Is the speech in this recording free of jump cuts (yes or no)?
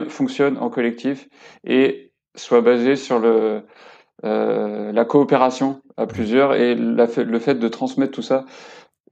yes